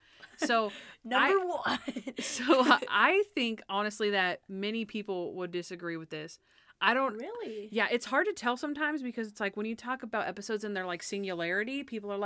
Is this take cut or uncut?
uncut